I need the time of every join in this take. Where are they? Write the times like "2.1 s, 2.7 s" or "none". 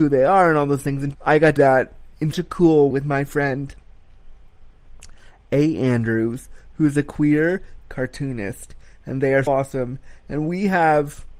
1.1 s, 1.6 s, 2.3 s, 2.9 s, 7.8 s, 9.5 s